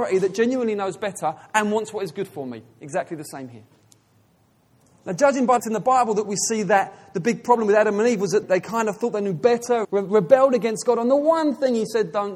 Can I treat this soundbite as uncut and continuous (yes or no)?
no